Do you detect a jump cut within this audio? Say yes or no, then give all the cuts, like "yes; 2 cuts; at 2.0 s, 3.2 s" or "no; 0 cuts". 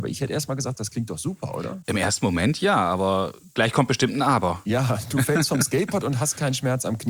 no; 0 cuts